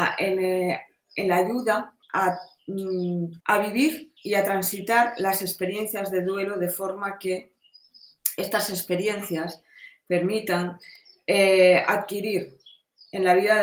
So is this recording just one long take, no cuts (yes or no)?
no